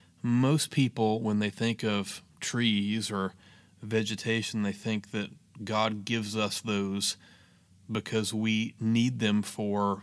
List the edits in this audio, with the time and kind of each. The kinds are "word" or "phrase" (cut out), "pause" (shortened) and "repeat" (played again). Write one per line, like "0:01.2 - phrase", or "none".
none